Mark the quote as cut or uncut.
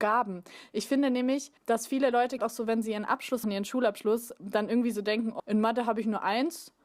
cut